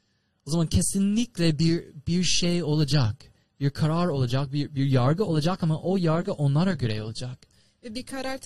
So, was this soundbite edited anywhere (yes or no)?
no